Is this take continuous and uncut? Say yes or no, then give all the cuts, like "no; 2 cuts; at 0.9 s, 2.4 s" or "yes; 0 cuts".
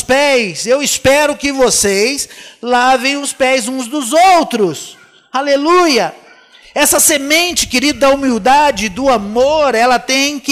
yes; 0 cuts